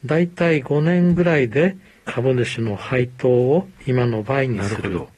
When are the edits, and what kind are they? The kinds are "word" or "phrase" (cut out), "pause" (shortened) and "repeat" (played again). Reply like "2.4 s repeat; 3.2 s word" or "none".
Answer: none